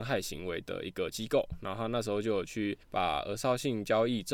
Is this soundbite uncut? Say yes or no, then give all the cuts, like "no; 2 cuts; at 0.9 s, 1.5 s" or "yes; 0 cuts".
no; 1 cut; at 2.8 s